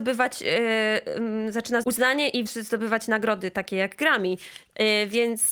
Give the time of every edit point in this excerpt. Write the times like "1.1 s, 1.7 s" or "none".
1.8 s, 2.5 s